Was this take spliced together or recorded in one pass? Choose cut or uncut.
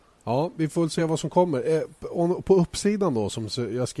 uncut